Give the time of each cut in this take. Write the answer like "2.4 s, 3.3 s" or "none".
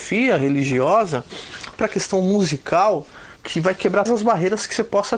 1.7 s, 3.4 s, 4.1 s